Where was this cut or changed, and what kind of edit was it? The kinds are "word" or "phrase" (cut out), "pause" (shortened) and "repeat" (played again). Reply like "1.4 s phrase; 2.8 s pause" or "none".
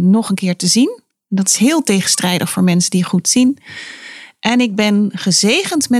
none